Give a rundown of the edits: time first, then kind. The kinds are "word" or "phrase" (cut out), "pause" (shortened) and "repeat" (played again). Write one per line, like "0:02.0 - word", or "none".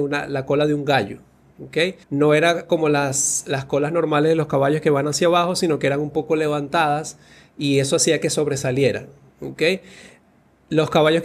0:02.0 - pause